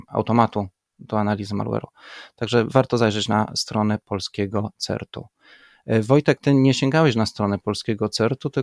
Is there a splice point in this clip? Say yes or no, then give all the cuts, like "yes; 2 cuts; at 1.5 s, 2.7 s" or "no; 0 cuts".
yes; 1 cut; at 6.4 s